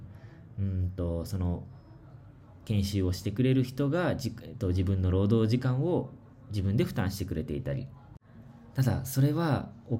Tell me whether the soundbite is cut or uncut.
uncut